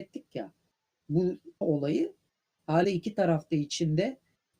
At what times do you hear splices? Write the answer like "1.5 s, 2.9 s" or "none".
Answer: 1.6 s, 2.8 s